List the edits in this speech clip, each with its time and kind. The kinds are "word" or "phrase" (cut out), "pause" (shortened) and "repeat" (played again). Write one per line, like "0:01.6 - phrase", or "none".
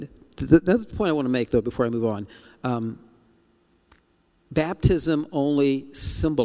none

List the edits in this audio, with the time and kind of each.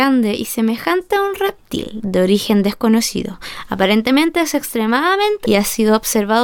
0:05.4 - word

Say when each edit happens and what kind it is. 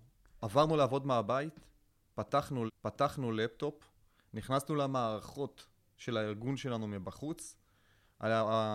0:02.7 - repeat

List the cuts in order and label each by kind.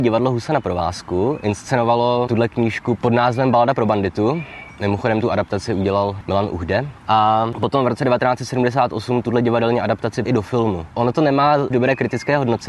0:02.3 - word
0:10.3 - word
0:11.7 - word

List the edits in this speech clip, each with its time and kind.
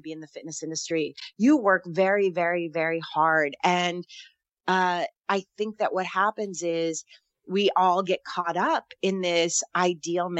none

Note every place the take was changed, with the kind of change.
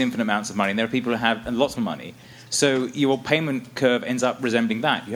0:01.8 - phrase

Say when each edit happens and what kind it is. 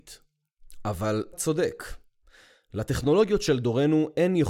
0:01.3 - word

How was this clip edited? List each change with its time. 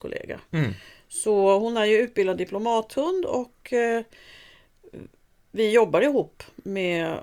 none

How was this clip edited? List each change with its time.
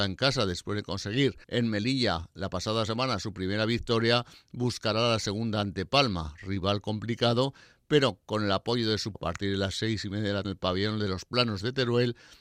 0:01.4 - pause
0:09.1 - word
0:10.4 - word

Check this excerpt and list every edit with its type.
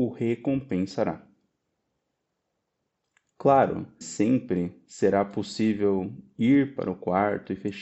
0:04.0 - phrase

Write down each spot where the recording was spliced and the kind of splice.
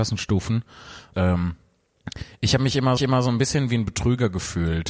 0:01.1 - word
0:03.0 - repeat

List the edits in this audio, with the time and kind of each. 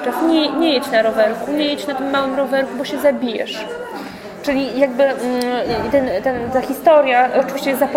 none

